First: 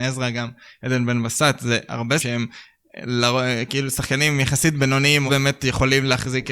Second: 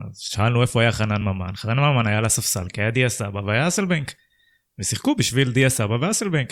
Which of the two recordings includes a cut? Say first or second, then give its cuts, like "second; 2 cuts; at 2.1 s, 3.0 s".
first; 2 cuts; at 2.2 s, 5.3 s